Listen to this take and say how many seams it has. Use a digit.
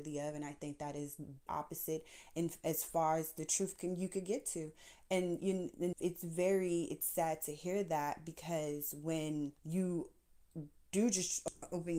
3